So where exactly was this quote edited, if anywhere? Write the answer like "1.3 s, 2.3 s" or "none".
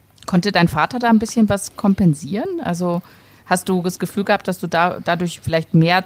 none